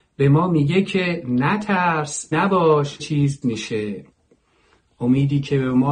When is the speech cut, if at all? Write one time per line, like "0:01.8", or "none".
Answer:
0:02.3
0:03.0
0:03.4